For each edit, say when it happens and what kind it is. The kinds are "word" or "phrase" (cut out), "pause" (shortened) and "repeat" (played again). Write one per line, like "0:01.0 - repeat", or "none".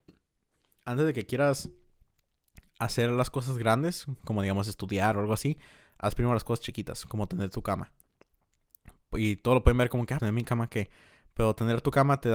0:10.2 - word